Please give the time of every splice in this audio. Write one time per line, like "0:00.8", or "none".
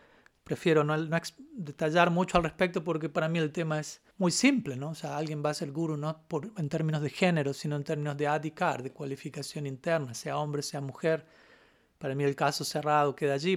0:04.1